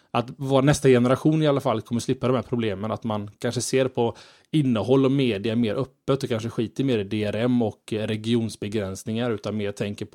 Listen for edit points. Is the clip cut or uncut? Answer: uncut